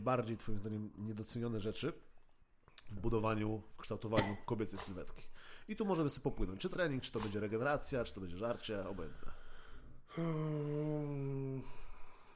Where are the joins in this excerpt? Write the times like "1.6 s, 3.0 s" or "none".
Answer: 6.7 s